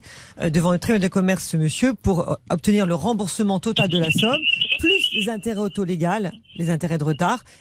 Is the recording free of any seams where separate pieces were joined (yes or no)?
yes